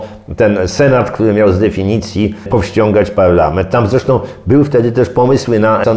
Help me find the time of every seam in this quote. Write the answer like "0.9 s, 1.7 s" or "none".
none